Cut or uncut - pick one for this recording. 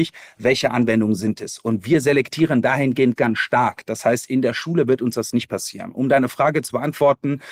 cut